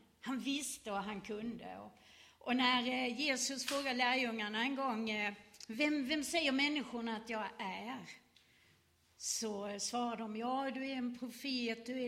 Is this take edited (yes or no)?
no